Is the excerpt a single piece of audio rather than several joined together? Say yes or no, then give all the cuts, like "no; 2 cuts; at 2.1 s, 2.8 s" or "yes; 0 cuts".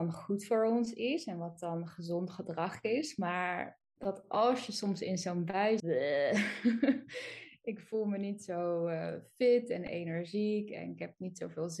no; 2 cuts; at 3.8 s, 5.8 s